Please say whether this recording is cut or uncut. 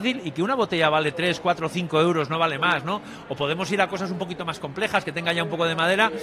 uncut